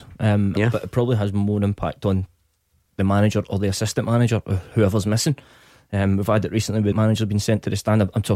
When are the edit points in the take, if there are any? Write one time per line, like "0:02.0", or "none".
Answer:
0:06.9